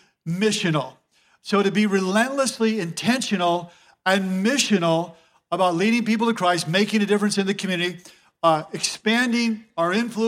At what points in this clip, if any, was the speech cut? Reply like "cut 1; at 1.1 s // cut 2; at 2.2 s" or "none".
none